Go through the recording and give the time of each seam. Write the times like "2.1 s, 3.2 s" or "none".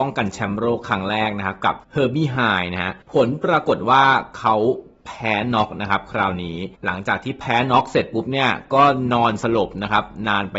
1.8 s, 3.0 s, 6.7 s